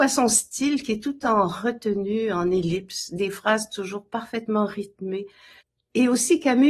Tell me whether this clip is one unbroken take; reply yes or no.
yes